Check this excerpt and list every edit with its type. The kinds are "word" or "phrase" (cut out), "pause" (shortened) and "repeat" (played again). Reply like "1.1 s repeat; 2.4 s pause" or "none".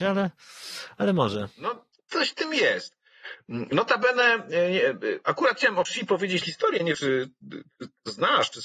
1.5 s pause; 5.9 s word; 6.4 s word; 6.9 s word